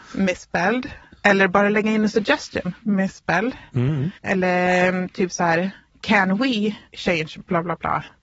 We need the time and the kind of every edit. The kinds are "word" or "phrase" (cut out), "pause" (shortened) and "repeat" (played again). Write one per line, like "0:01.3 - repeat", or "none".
0:04.2 - pause
0:06.9 - pause